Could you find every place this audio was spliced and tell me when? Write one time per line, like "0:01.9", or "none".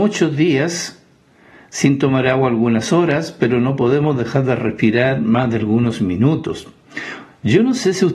none